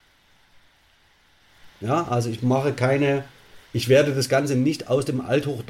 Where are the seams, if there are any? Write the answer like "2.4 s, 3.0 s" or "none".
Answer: 1.7 s, 3.6 s